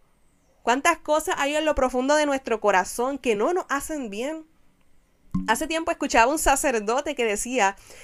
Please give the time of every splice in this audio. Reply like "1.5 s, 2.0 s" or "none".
none